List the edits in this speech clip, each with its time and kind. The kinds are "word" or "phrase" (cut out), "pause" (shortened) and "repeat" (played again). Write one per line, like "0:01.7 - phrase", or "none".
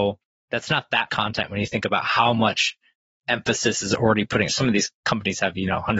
0:01.1 - word
0:04.5 - word